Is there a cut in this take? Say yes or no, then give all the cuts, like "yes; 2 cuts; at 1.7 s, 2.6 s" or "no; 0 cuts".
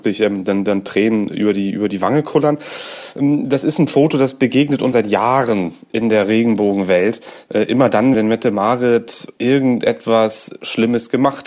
yes; 2 cuts; at 4.9 s, 8.1 s